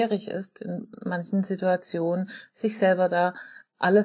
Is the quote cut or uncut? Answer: uncut